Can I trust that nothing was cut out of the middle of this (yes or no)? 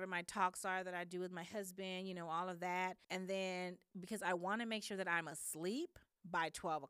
no